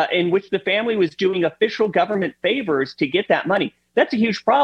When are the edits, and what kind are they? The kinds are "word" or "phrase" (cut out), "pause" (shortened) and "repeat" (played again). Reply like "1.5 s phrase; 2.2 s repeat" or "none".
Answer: none